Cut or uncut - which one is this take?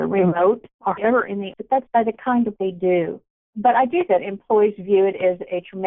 cut